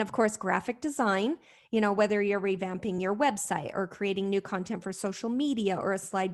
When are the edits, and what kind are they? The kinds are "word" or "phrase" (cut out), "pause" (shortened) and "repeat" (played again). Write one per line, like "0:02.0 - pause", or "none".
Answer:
none

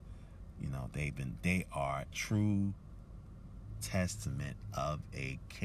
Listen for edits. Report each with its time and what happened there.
0:02.1 - word

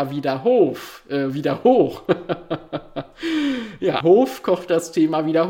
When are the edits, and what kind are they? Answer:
0:04.0 - word

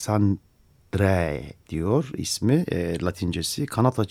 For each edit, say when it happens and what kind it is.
0:01.6 - pause

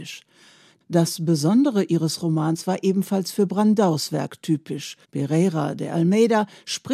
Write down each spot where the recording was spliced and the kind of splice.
0:05.0 - pause

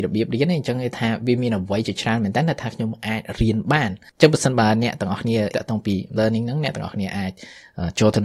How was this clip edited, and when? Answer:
0:05.5 - word
0:06.2 - word

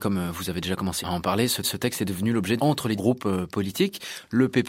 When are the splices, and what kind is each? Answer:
0:01.0 - word
0:01.6 - repeat
0:02.6 - phrase
0:03.0 - word

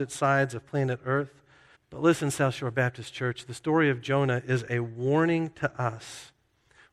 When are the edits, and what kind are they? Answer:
0:01.7 - pause

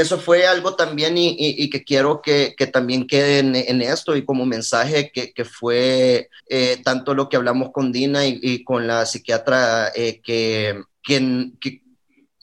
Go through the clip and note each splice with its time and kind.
0:06.4 - pause
0:10.9 - pause

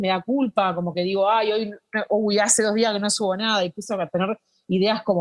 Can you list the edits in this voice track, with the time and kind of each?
none

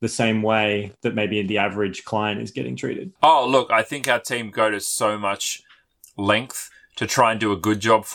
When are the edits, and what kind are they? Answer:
0:03.2 - pause

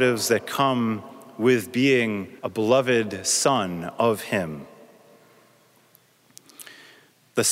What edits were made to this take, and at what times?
0:02.4 - pause

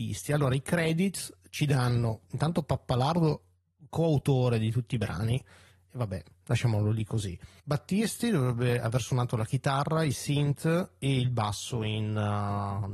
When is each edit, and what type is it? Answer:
none

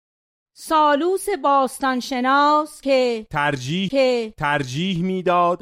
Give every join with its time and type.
0:03.9 - repeat

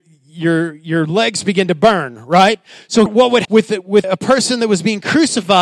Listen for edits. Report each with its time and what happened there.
0:03.1 - word
0:03.4 - word
0:04.0 - word

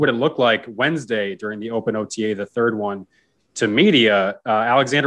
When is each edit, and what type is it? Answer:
none

